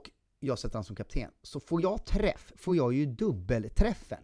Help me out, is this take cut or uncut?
uncut